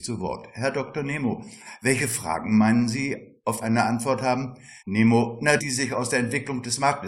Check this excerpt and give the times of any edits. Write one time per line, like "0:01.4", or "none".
0:03.6
0:04.8
0:05.6